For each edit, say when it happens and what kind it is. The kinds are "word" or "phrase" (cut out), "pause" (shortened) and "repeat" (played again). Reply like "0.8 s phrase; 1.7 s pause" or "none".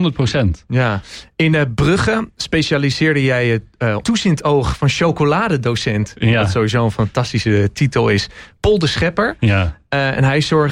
4.0 s word